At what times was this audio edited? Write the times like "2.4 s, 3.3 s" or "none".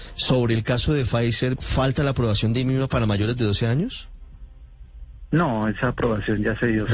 1.6 s